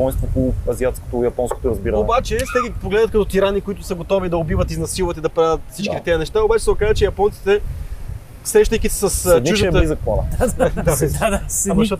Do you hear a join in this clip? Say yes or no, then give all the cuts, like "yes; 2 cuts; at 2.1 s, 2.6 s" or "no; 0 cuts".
no; 0 cuts